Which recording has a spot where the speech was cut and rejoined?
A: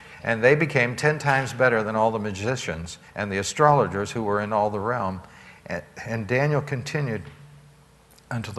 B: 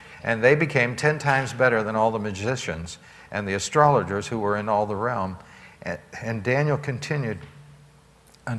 A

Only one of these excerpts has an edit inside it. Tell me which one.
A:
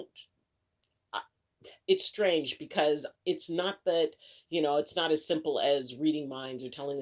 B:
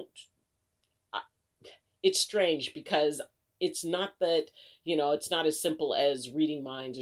A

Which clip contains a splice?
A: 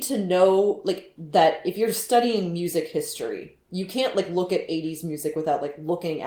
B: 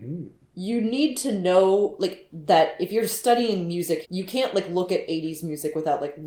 B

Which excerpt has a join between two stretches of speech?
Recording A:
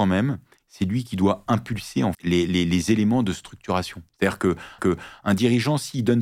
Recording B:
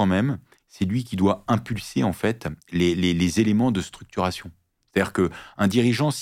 A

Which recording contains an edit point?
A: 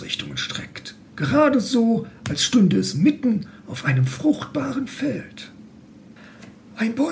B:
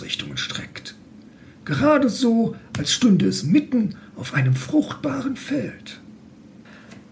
A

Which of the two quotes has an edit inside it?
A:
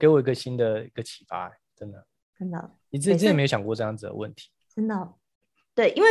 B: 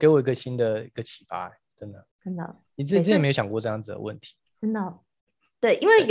B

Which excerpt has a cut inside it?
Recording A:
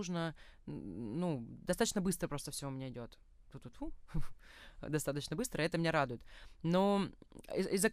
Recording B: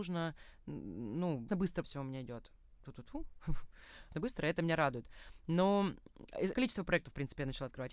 B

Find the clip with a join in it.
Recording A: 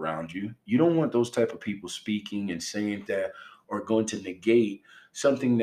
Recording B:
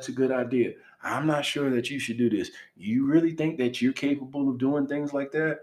A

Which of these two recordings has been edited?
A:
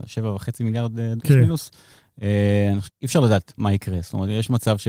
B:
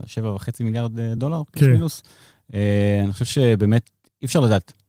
A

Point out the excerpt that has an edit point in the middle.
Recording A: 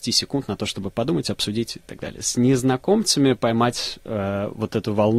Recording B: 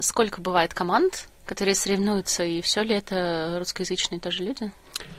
B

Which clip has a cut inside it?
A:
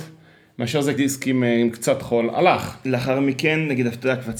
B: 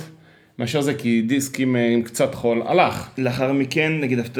A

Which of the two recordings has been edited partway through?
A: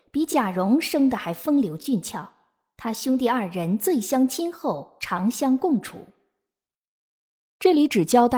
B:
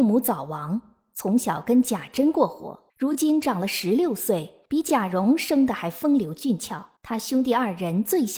B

